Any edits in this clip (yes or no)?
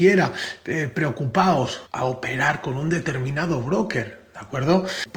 yes